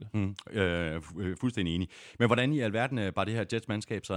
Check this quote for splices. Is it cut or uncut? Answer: uncut